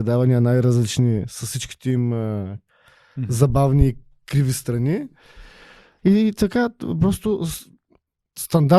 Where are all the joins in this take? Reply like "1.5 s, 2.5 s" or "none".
none